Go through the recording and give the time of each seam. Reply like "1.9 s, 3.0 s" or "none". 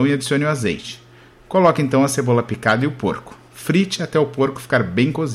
none